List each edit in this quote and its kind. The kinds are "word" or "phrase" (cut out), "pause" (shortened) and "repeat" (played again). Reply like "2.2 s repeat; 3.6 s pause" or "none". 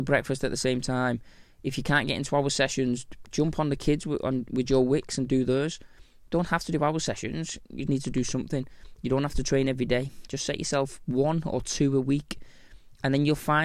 7.9 s word